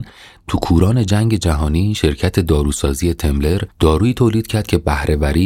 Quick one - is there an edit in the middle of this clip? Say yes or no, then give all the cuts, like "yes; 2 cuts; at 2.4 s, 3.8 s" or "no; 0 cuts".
no; 0 cuts